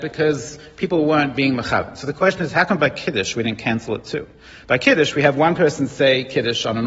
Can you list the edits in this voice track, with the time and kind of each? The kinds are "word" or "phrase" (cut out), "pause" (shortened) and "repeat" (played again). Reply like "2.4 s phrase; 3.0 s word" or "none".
none